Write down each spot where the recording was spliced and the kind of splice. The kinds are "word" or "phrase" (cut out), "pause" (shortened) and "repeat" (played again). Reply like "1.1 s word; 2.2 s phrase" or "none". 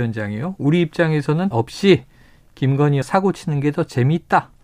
1.5 s word; 3.0 s word